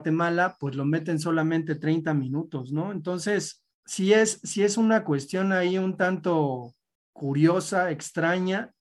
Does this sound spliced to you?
yes; 1 cut; at 3.7 s

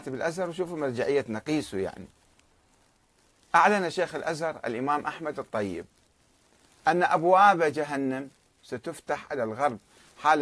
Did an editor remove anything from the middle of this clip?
no; 0 cuts

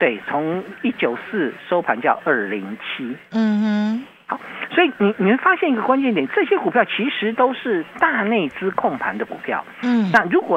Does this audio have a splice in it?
no; 0 cuts

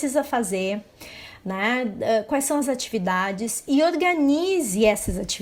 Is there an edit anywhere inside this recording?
no; 0 cuts

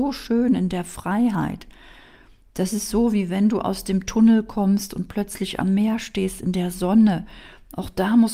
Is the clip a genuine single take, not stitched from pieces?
yes; 0 cuts

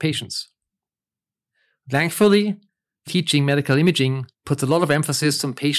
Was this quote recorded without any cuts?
no; 2 cuts; at 3.1 s, 4.3 s

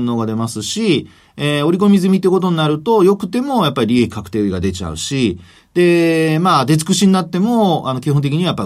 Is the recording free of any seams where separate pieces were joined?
yes; 0 cuts

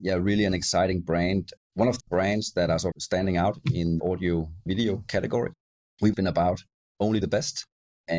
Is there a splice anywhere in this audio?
yes; 6 cuts; at 1.6 s, 2.0 s, 2.9 s, 4.0 s, 6.1 s, 7.2 s

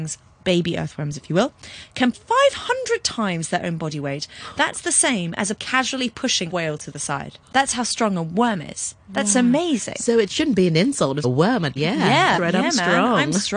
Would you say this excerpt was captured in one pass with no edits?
no; 7 cuts; at 2.1 s, 5.6 s, 6.5 s, 7.4 s, 11.2 s, 11.8 s, 12.4 s

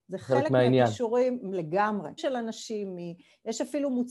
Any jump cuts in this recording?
yes; 1 cut; at 2.2 s

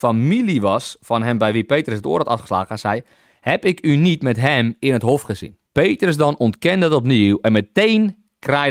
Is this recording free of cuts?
no; 1 cut; at 5.7 s

